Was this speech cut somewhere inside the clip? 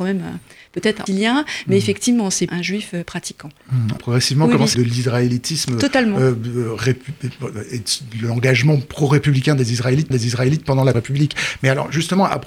yes; 6 cuts; at 1.1 s, 2.5 s, 4.0 s, 4.7 s, 10.1 s, 10.9 s

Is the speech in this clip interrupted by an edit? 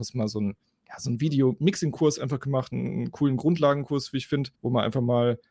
yes; 1 cut; at 4.5 s

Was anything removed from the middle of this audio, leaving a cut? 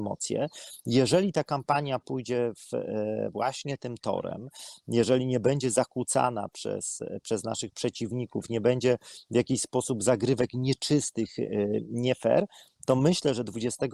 no; 0 cuts

